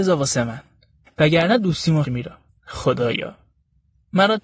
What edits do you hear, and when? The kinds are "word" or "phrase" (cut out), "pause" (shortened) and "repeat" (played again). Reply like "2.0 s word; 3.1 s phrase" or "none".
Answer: 2.0 s phrase; 2.5 s pause